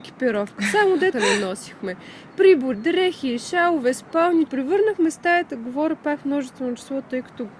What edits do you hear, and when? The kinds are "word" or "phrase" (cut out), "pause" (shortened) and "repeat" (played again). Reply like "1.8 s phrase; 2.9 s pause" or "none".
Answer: 1.1 s word; 2.7 s phrase; 4.5 s phrase